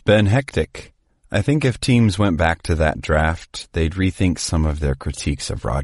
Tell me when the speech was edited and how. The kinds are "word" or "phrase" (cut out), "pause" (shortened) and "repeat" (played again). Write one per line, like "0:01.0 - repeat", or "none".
0:01.1 - pause